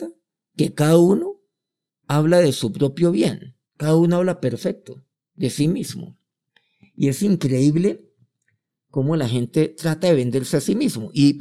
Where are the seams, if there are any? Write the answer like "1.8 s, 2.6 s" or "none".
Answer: 3.6 s, 5.1 s